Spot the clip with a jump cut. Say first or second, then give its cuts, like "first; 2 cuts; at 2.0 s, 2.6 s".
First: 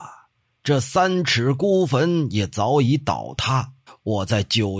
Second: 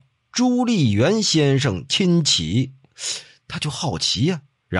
first; 1 cut; at 3.9 s